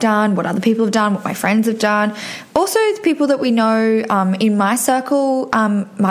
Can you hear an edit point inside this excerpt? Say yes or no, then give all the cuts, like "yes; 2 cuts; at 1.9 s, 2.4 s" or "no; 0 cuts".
no; 0 cuts